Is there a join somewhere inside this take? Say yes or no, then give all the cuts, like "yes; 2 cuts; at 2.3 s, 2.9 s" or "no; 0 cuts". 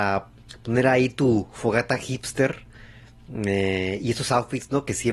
no; 0 cuts